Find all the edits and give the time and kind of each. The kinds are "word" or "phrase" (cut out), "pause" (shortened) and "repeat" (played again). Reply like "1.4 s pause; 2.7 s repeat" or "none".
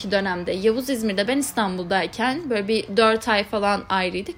none